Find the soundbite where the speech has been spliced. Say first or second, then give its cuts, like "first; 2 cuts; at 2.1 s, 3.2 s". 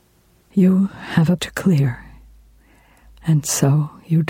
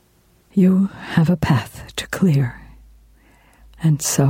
first; 1 cut; at 1.4 s